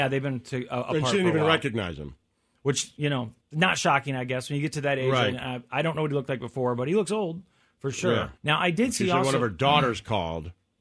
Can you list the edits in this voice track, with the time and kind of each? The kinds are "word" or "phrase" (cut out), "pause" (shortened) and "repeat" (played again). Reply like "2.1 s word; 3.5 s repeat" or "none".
3.4 s pause; 8.4 s pause